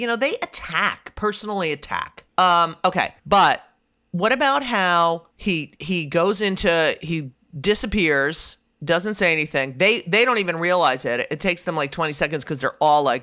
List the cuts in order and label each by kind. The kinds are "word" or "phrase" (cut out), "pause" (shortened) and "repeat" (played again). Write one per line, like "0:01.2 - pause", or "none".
0:02.3 - pause
0:03.2 - pause
0:05.3 - pause